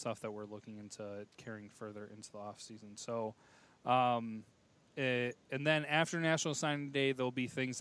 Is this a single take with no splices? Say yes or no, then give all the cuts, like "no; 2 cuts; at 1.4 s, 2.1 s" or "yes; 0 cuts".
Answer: yes; 0 cuts